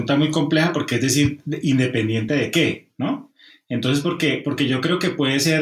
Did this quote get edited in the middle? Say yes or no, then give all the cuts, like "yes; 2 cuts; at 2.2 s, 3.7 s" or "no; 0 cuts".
no; 0 cuts